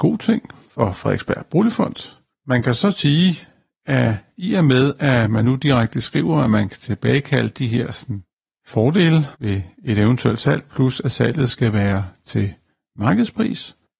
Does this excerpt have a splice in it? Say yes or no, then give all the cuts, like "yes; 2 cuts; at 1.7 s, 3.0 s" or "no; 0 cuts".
yes; 1 cut; at 9.3 s